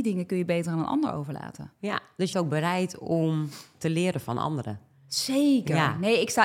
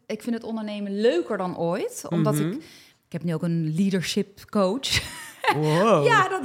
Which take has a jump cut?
first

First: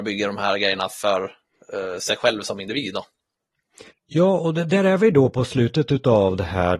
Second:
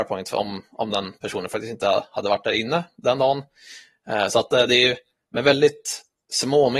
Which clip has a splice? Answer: first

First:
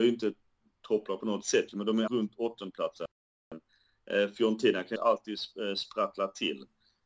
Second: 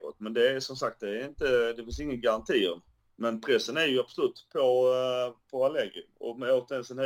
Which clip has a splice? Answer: first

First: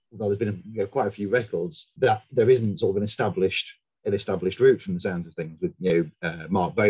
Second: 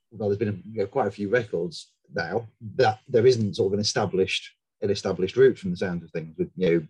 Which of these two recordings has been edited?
first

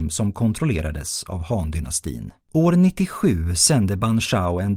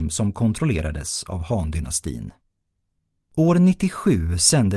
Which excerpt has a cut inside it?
first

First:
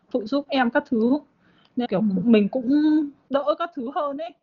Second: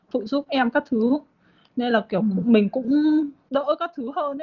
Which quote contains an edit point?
first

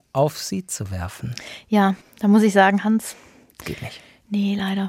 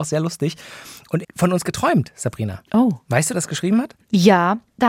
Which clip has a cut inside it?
second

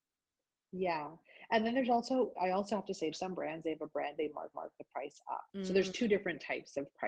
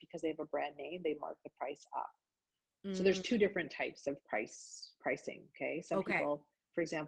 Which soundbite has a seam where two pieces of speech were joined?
first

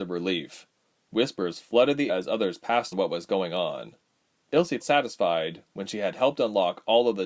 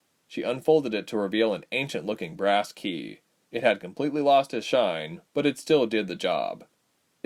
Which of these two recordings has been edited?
first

